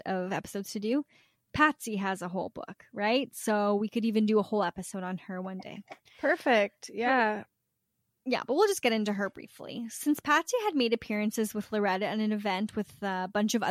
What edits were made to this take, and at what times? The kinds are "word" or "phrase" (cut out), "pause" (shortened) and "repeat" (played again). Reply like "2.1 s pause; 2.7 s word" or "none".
none